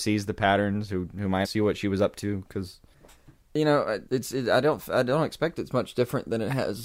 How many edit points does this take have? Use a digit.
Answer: 2